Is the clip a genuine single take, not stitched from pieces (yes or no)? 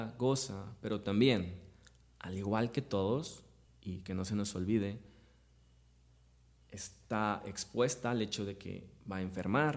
yes